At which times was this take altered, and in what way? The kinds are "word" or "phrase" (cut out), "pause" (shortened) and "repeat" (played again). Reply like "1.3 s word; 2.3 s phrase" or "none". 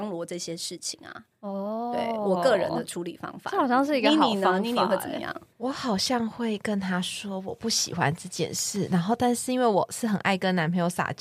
5.5 s pause